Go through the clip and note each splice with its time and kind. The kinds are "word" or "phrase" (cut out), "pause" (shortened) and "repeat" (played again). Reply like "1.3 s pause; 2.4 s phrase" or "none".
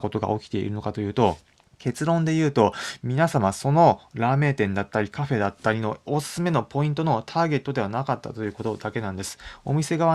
1.6 s pause